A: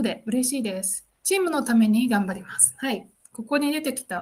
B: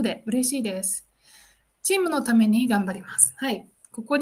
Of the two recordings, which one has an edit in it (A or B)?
A